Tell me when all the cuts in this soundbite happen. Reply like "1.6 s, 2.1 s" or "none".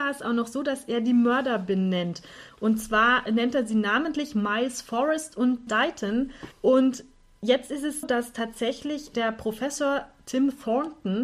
5.7 s, 6.5 s, 8.0 s